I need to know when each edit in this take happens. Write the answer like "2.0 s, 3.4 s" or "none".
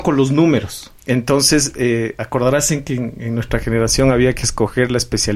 1.0 s

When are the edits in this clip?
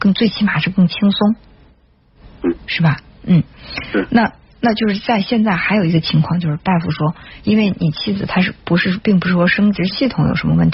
none

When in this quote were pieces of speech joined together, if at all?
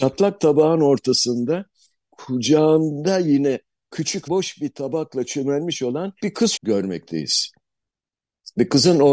2.1 s, 4.3 s, 6.2 s, 6.6 s

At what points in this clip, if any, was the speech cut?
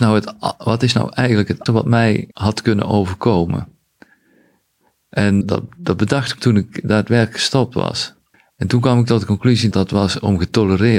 1.7 s, 2.3 s, 5.4 s, 6.4 s, 8.3 s, 9.7 s

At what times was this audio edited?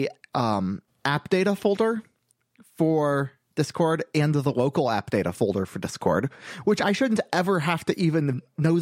none

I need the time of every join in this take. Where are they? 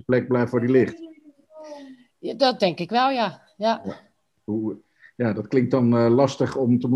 none

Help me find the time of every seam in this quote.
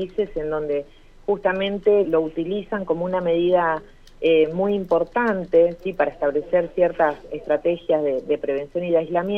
2.0 s

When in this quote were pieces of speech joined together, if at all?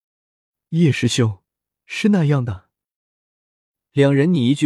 none

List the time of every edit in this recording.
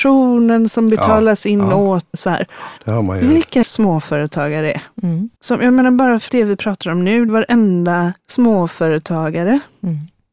2.1 s, 2.8 s, 3.6 s, 5.4 s, 6.3 s, 7.3 s, 8.2 s

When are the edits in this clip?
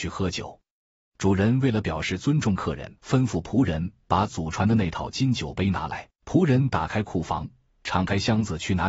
3.0 s, 6.2 s

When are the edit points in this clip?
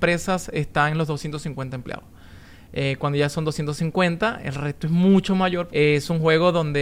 5.7 s

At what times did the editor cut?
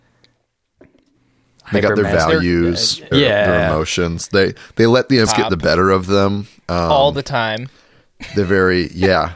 3.1 s, 5.3 s

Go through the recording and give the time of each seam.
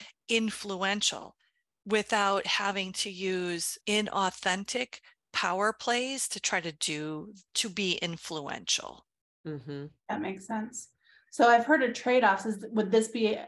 none

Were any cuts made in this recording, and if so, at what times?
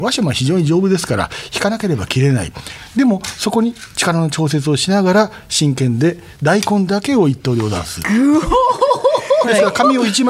none

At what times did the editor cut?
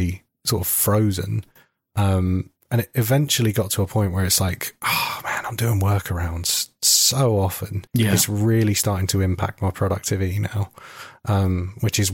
7.9 s

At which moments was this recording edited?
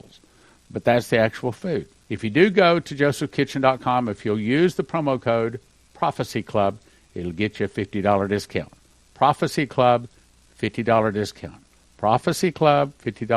none

